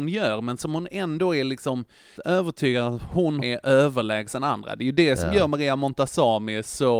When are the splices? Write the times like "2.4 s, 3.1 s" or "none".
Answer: 2.2 s, 3.4 s